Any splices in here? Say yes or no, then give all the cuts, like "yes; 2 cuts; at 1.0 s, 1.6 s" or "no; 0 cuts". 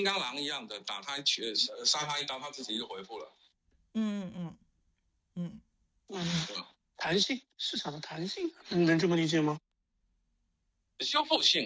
no; 0 cuts